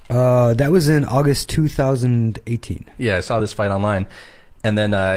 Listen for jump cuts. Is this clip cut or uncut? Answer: uncut